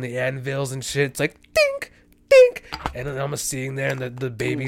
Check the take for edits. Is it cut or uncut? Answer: uncut